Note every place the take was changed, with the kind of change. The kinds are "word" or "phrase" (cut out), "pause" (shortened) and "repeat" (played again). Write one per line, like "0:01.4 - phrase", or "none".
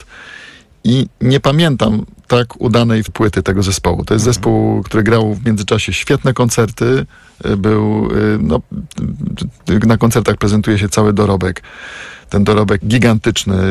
0:03.1 - word
0:12.8 - word